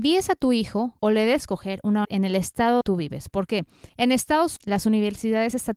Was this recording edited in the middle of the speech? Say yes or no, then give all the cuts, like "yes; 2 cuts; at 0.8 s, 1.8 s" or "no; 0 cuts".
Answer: yes; 6 cuts; at 1.0 s, 1.4 s, 2.0 s, 2.8 s, 3.9 s, 4.6 s